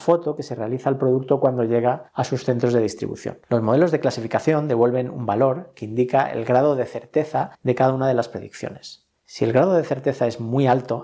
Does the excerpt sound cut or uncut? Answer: cut